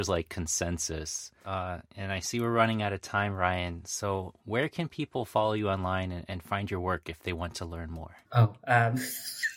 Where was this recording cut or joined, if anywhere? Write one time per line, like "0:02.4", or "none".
0:04.4
0:08.2